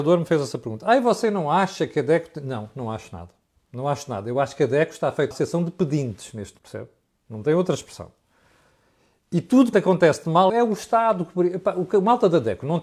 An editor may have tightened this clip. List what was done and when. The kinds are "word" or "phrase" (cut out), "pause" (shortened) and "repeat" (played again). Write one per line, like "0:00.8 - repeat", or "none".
0:05.3 - word
0:06.6 - word
0:09.7 - word
0:10.5 - word